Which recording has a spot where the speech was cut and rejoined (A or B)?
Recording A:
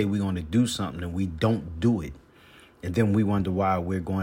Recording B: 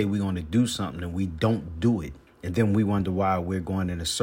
B